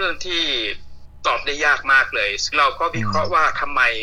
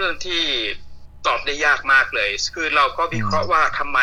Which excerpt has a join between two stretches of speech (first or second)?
first